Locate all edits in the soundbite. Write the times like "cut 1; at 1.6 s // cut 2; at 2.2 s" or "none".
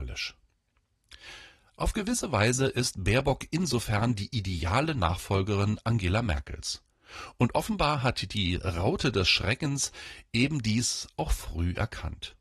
none